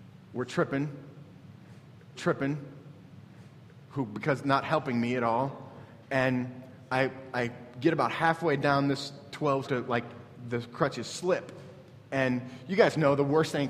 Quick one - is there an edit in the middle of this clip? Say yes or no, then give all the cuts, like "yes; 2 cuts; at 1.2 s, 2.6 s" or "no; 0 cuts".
yes; 4 cuts; at 2.1 s, 6.0 s, 9.3 s, 9.6 s